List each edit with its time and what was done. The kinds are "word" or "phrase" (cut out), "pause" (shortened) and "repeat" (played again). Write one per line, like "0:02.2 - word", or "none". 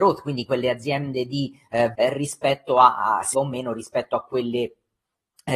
0:02.0 - word
0:03.3 - phrase